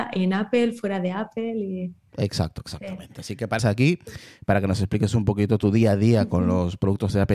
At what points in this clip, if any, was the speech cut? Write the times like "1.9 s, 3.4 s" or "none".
3.6 s